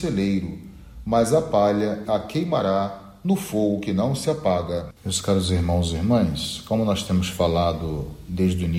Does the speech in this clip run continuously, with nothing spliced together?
no; 2 cuts; at 2.1 s, 5.0 s

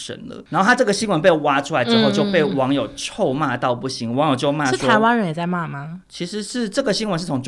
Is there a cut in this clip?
yes; 1 cut; at 6.0 s

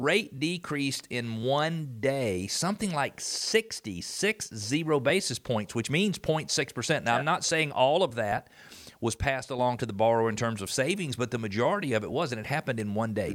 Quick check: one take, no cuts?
yes; 0 cuts

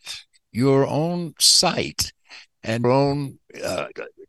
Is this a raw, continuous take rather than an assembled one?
no; 1 cut; at 2.8 s

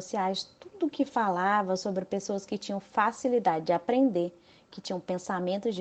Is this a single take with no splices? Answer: yes; 0 cuts

